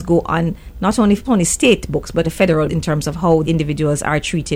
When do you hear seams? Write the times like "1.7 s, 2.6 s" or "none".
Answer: 1.2 s, 2.2 s, 2.7 s, 3.4 s